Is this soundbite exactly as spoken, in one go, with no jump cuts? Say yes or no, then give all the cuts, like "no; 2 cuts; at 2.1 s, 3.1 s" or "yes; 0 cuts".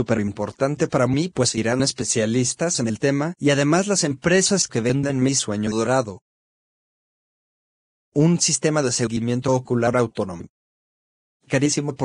yes; 0 cuts